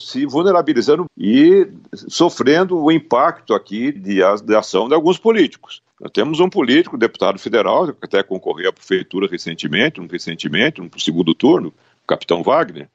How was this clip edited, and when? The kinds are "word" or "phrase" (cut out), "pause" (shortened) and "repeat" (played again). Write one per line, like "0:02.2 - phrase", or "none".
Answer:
0:01.1 - word
0:04.0 - word
0:05.9 - pause
0:10.1 - repeat